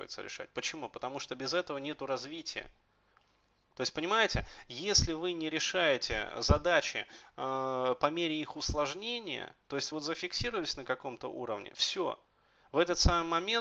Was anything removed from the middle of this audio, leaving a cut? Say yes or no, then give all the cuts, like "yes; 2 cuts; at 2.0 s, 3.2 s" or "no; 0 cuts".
yes; 1 cut; at 9.9 s